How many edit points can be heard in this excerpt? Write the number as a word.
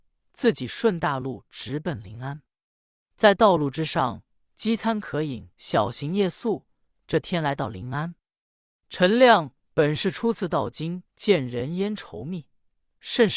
two